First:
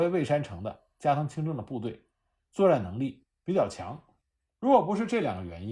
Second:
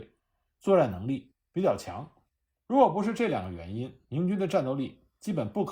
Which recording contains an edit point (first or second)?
second